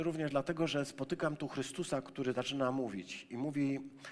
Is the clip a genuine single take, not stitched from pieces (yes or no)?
yes